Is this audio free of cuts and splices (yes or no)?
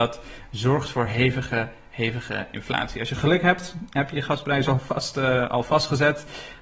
yes